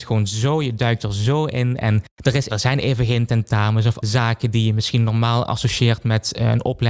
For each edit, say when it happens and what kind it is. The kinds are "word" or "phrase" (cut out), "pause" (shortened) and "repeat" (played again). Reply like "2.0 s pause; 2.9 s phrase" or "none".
2.1 s pause; 2.5 s word; 4.0 s word